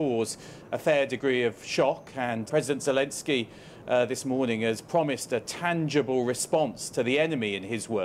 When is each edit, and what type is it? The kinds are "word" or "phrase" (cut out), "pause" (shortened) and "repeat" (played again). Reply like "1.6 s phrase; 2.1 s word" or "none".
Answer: 2.5 s word